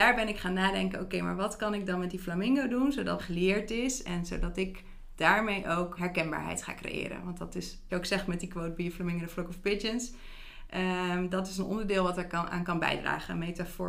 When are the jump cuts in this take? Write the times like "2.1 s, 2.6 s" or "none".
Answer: 3.2 s, 6.0 s, 7.9 s